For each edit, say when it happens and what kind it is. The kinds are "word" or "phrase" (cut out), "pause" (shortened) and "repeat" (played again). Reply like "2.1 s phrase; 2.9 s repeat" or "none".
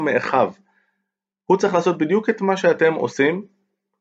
none